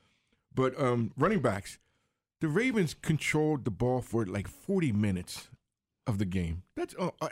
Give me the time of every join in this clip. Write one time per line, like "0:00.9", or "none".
none